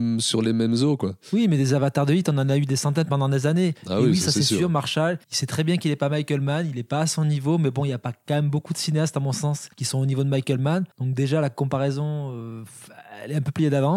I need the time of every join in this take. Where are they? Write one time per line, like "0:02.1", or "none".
0:05.2
0:09.7
0:10.9